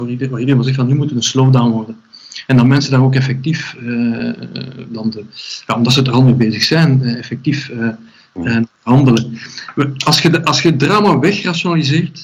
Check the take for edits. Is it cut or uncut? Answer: uncut